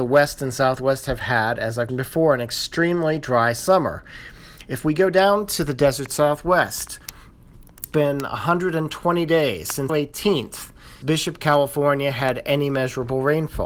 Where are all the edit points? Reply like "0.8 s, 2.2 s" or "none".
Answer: 1.9 s, 7.9 s, 9.9 s, 11.0 s